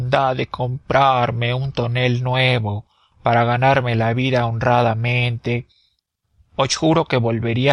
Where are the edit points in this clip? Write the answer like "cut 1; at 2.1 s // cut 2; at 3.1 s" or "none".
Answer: none